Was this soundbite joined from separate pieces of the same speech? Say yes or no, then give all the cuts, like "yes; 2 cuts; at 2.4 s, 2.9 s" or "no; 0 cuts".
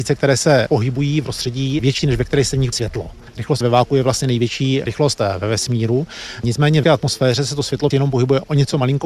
yes; 7 cuts; at 1.2 s, 2.0 s, 2.7 s, 3.6 s, 4.9 s, 6.8 s, 7.9 s